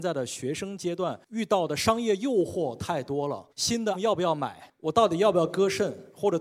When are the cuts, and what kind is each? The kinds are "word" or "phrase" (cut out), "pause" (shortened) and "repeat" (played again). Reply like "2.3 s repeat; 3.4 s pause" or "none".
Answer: 3.5 s pause; 3.9 s word